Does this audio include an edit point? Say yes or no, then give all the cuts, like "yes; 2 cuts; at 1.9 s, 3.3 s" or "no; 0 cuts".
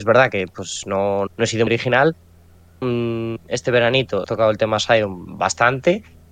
yes; 4 cuts; at 1.3 s, 1.7 s, 2.8 s, 4.2 s